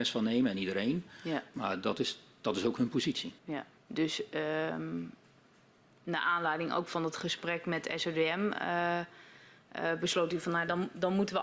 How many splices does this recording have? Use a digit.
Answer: 2